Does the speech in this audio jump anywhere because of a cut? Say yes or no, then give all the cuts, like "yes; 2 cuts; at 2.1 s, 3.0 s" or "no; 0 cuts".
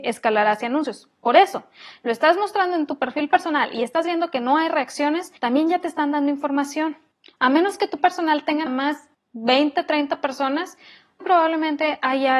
yes; 4 cuts; at 5.4 s, 8.0 s, 8.7 s, 11.2 s